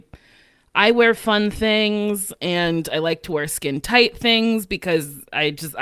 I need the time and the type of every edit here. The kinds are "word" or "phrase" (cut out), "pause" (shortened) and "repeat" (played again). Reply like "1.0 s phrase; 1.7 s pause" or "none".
none